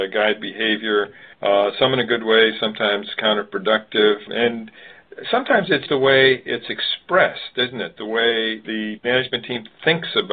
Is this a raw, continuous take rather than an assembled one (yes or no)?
no